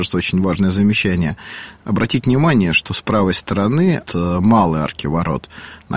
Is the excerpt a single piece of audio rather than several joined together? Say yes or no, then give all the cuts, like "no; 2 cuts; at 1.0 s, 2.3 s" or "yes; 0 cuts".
no; 1 cut; at 4.1 s